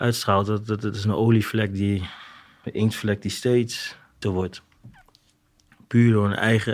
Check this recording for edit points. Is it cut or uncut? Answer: cut